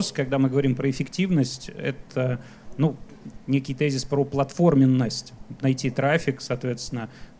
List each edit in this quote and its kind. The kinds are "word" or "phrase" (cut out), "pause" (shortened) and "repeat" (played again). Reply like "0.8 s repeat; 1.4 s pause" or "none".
5.6 s phrase